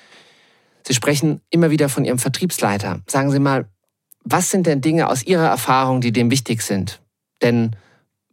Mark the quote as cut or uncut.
uncut